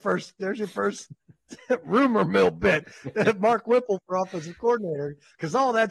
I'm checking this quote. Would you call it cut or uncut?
uncut